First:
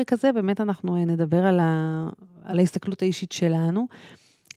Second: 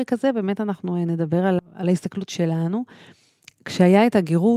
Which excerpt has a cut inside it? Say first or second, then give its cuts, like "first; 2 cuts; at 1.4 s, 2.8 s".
second; 2 cuts; at 1.6 s, 2.3 s